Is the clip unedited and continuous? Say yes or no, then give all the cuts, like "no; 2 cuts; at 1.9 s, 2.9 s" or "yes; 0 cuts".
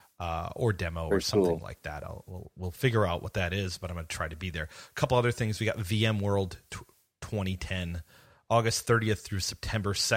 yes; 0 cuts